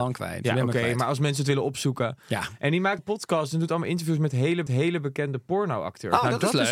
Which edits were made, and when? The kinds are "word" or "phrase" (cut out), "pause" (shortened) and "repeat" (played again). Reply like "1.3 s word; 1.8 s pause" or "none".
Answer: 3.0 s word; 4.7 s repeat